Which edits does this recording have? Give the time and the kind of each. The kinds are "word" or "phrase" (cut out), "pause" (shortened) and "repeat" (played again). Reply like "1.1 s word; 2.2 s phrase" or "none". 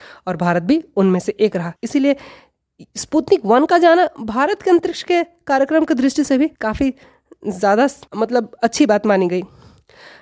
1.8 s pause; 6.6 s pause; 8.1 s pause